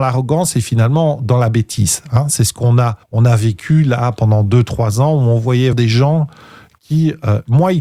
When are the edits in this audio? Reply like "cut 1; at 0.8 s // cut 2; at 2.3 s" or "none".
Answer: cut 1; at 3.0 s // cut 2; at 5.7 s